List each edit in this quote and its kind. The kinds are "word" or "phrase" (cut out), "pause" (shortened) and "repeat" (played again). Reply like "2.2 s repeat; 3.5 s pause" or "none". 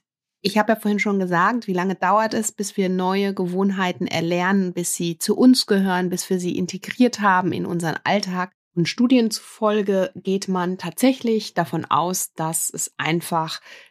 none